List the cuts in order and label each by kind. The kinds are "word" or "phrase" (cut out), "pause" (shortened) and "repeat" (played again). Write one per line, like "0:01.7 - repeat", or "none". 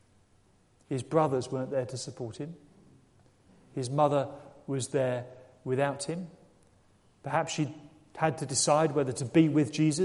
none

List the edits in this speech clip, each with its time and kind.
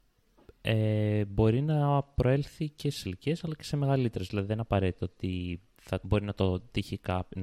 0:03.0 - word
0:06.0 - word

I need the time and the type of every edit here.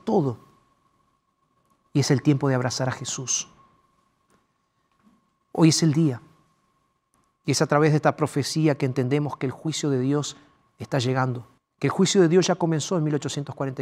0:11.6 - pause

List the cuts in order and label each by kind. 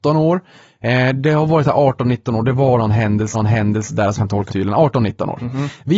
0:03.3 - repeat
0:04.2 - word
0:04.5 - phrase

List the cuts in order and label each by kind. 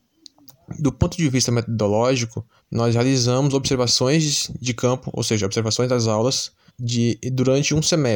0:02.6 - pause
0:06.7 - pause

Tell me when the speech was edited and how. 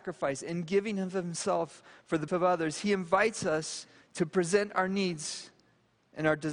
0:02.3 - word
0:04.0 - phrase

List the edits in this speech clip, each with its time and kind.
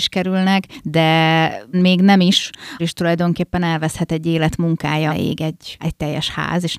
0:01.7 - word
0:02.8 - word
0:05.1 - word
0:05.8 - word

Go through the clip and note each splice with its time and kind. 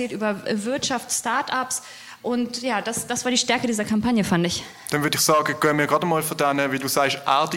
none

